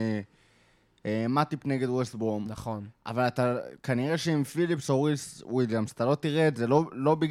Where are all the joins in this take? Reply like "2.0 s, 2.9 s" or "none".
3.8 s

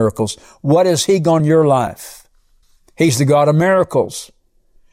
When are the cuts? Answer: 1.4 s, 2.6 s

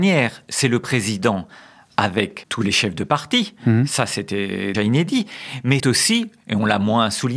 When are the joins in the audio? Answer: 4.7 s, 5.8 s

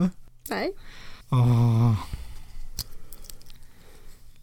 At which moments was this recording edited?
1.2 s

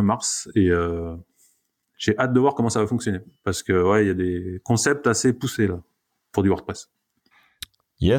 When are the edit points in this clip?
none

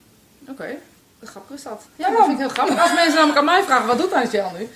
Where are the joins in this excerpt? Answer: 1.0 s, 1.9 s

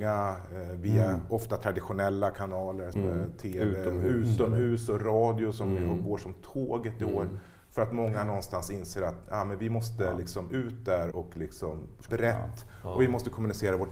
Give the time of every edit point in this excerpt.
2.9 s, 11.1 s, 12.1 s

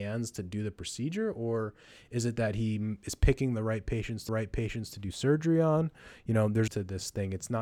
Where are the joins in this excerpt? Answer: 4.3 s, 6.7 s

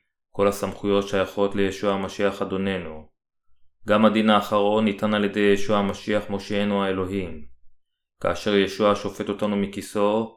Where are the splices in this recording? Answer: none

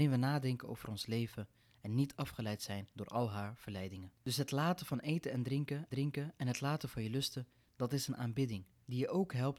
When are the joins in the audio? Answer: 2.9 s, 4.2 s, 5.9 s

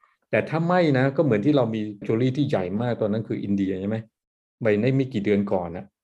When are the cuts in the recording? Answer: 2.0 s

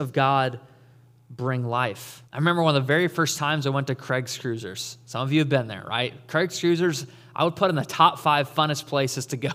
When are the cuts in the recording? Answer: 2.3 s

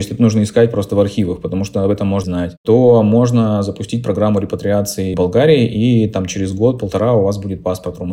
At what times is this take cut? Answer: 2.2 s, 5.1 s

